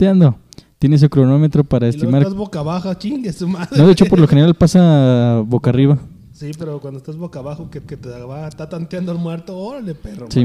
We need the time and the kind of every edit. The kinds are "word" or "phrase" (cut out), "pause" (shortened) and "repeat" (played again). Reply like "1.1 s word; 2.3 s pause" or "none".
7.9 s repeat